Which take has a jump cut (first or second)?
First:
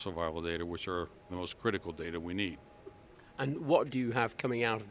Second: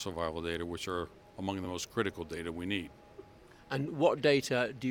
first